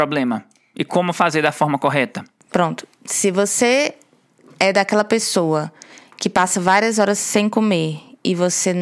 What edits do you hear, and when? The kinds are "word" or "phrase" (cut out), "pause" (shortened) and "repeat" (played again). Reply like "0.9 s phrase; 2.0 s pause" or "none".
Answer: none